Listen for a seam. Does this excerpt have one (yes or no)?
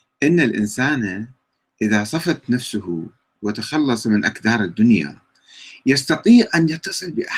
no